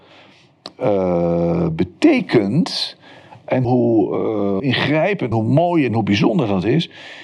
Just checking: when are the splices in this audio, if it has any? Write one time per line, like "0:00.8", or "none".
0:03.6
0:04.6
0:05.3